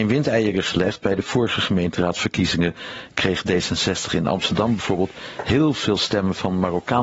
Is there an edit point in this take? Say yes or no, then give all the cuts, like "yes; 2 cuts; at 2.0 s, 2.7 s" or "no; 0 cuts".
no; 0 cuts